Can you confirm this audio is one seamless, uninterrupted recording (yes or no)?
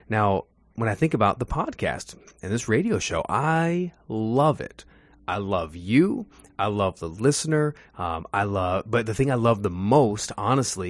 yes